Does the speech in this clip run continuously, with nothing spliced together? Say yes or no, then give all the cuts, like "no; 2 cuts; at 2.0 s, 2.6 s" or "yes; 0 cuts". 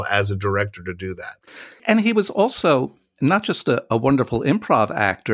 yes; 0 cuts